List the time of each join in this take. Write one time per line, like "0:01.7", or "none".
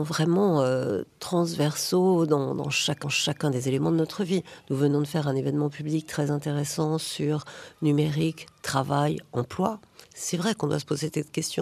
0:03.0
0:10.0